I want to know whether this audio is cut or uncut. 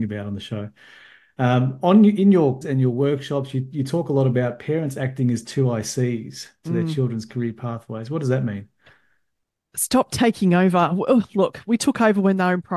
cut